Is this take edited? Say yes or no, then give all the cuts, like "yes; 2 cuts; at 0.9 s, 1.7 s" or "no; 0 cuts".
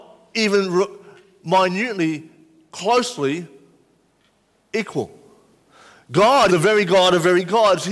yes; 1 cut; at 6.5 s